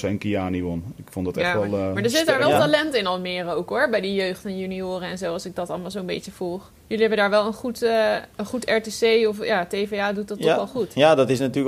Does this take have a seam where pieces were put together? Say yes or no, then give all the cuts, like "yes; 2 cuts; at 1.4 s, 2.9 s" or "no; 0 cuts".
yes; 2 cuts; at 6.8 s, 8.3 s